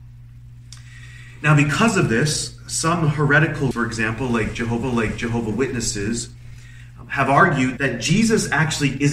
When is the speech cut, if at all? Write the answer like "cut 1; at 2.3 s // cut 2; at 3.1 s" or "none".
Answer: cut 1; at 3.7 s // cut 2; at 4.8 s // cut 3; at 7.8 s